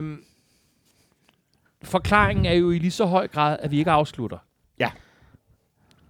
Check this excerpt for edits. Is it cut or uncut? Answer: cut